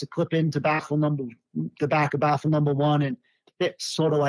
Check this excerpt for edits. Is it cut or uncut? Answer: uncut